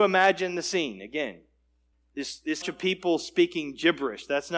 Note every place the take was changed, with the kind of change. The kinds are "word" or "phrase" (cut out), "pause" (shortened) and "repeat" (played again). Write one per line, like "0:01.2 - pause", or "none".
0:01.9 - pause
0:02.6 - phrase